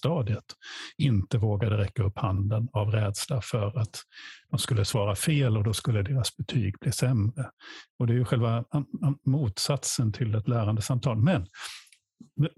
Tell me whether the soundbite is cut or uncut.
uncut